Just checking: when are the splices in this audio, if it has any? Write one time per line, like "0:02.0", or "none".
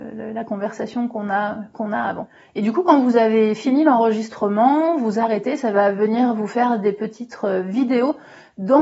none